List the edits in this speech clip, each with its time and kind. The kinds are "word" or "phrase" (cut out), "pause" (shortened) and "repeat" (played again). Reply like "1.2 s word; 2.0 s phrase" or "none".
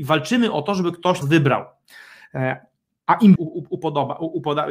1.2 s word; 3.4 s phrase

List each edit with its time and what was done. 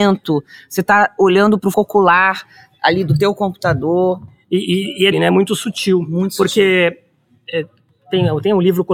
1.7 s word; 5.1 s word

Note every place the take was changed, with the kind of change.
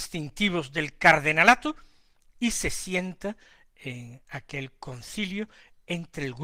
none

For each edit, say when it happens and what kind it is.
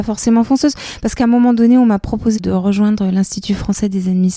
none

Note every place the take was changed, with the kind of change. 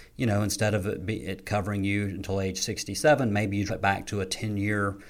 3.7 s word

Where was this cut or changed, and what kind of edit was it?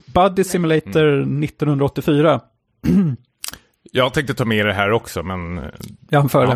none

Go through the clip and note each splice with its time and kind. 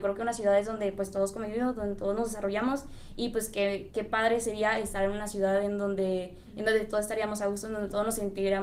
none

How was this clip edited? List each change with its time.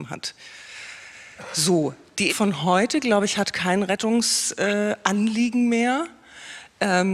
2.3 s word

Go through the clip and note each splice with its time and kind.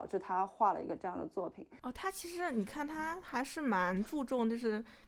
1.8 s pause

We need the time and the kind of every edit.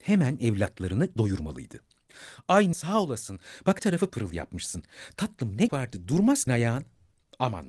1.2 s word; 2.7 s word; 3.8 s word; 4.1 s word; 5.7 s word; 6.5 s word

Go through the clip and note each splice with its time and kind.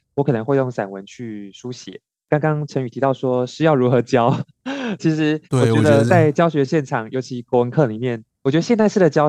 5.0 s word; 5.4 s pause; 6.1 s phrase

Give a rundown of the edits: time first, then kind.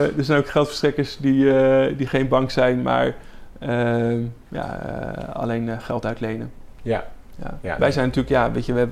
none

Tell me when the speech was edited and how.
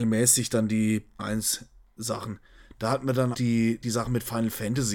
1.2 s word; 3.3 s word; 3.8 s word

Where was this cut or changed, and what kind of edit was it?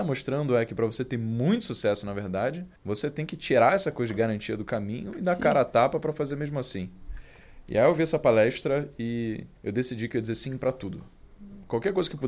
2.8 s pause; 9.6 s pause

